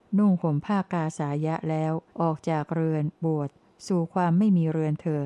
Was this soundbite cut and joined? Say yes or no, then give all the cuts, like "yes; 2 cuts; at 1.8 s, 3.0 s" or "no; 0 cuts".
yes; 1 cut; at 2.1 s